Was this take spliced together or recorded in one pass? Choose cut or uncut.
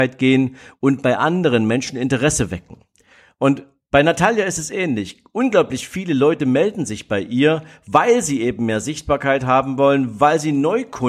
uncut